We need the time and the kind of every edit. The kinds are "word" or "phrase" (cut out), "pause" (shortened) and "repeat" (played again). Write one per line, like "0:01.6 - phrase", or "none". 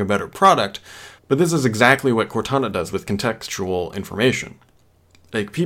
0:01.2 - pause